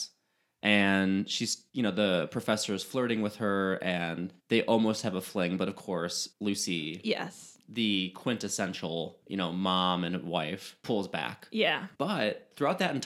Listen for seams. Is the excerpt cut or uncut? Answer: cut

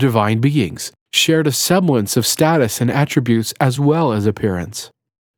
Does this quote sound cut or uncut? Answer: uncut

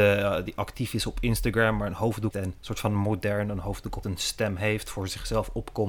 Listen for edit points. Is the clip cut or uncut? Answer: cut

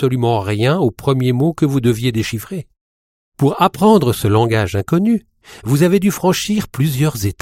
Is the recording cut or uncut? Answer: uncut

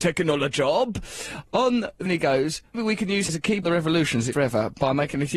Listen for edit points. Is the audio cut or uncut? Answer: cut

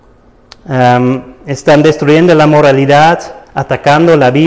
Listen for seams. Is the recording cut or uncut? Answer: cut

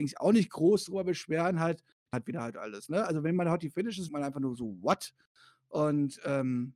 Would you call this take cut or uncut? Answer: cut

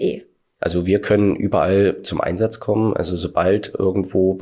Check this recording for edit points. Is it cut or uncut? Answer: uncut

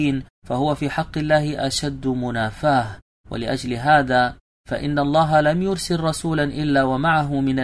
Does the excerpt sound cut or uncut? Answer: uncut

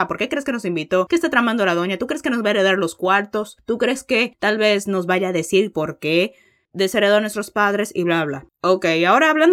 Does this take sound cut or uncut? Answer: uncut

